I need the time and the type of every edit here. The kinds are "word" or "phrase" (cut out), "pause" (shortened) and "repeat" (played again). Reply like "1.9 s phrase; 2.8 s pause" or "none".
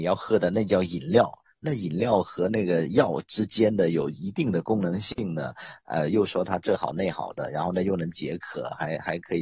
none